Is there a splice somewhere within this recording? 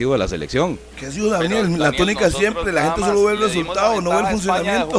no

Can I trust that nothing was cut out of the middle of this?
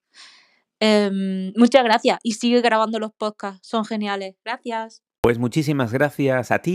no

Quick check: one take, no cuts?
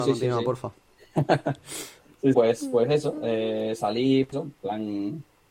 no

